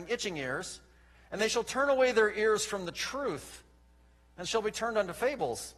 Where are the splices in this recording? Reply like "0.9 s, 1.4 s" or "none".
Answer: none

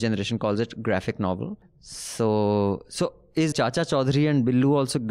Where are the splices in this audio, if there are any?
3.5 s

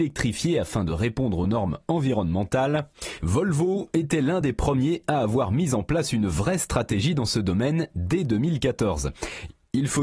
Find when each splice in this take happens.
none

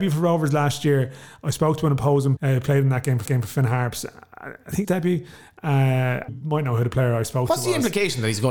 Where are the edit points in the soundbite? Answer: 2.4 s, 3.3 s, 4.8 s, 6.3 s

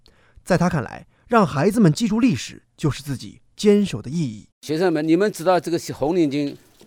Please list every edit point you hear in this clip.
4.5 s

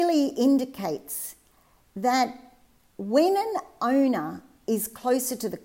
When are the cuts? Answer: none

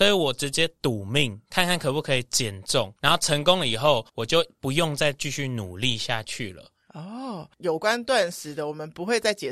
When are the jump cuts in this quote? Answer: 3.0 s, 4.1 s

